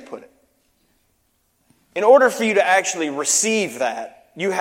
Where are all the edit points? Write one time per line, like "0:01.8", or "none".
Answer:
none